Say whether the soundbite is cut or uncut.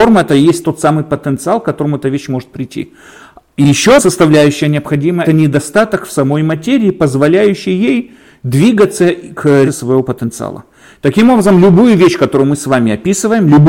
cut